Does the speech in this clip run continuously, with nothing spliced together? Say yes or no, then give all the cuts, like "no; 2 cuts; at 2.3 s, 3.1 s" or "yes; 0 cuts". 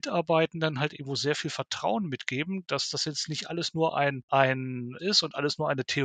no; 1 cut; at 5.0 s